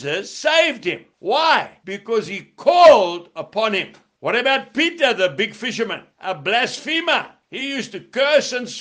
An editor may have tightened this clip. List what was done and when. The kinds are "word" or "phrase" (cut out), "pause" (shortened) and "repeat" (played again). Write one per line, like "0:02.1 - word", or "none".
none